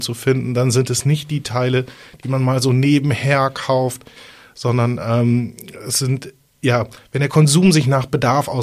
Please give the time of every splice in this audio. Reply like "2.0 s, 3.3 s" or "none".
none